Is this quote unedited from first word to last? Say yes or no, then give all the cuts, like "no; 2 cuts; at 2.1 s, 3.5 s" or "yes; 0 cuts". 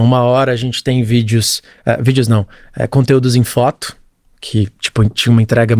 yes; 0 cuts